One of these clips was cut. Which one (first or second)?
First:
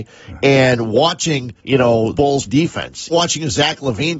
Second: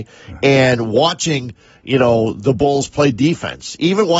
first